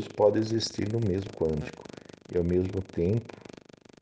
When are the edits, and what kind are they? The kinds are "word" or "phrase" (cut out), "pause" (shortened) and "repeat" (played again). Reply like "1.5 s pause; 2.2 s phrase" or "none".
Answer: 1.3 s word